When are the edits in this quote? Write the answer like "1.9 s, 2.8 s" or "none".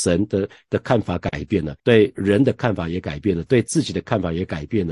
1.8 s